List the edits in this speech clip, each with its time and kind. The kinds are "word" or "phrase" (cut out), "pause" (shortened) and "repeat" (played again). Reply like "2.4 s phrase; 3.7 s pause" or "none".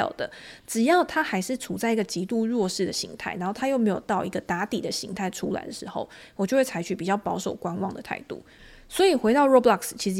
none